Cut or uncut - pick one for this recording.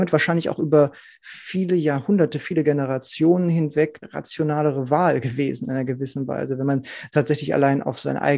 cut